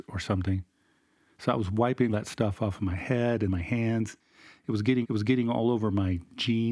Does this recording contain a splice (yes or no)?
yes